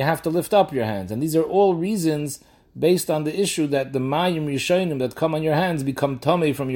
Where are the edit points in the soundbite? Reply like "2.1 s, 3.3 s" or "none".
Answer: none